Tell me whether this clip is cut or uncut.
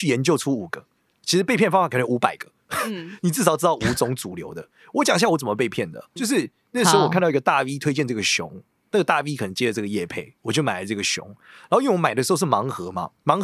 cut